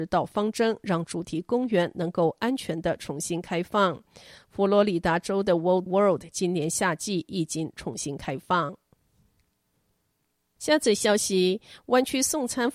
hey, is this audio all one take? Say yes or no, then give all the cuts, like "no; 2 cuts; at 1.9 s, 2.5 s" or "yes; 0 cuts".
no; 1 cut; at 5.9 s